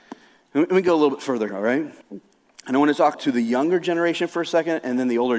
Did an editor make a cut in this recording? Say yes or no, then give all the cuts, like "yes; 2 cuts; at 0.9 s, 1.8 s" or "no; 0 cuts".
yes; 3 cuts; at 1.5 s, 2.0 s, 3.1 s